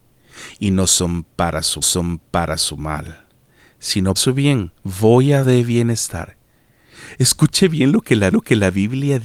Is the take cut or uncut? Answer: cut